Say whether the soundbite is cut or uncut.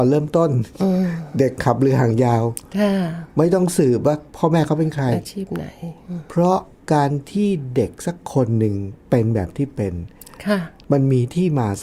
cut